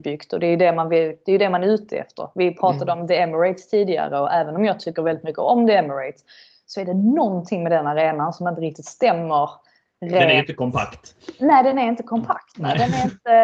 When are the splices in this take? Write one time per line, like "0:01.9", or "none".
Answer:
none